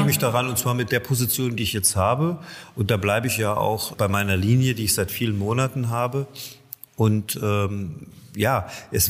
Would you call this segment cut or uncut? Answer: cut